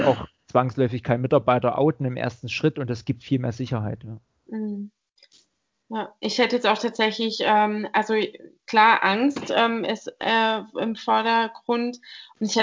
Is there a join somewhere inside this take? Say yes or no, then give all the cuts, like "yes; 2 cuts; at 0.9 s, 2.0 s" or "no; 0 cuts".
no; 0 cuts